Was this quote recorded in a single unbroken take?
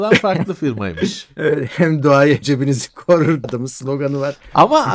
no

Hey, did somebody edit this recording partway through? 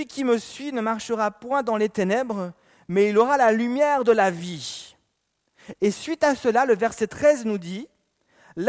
no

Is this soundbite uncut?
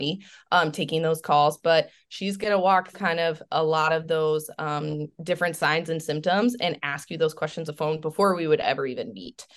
no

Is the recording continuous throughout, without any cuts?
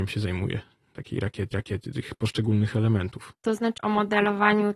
no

